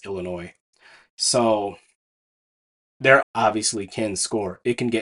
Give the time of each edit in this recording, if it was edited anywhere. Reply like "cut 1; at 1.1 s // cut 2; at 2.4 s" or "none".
cut 1; at 3.2 s